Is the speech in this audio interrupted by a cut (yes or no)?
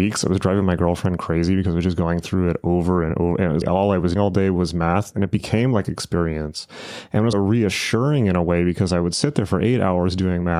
yes